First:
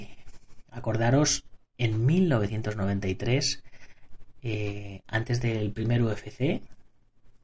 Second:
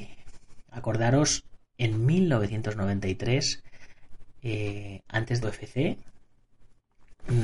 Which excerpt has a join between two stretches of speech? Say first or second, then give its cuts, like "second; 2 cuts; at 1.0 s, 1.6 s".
second; 1 cut; at 5.4 s